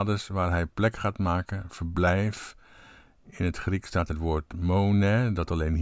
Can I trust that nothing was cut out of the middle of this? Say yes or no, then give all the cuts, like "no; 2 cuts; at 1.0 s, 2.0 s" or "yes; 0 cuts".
no; 1 cut; at 4.1 s